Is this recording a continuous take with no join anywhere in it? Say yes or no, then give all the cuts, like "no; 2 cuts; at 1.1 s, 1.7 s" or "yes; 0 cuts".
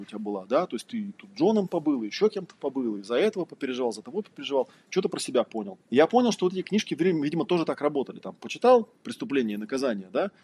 no; 1 cut; at 5.8 s